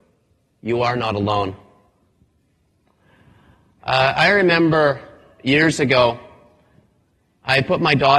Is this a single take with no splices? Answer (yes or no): yes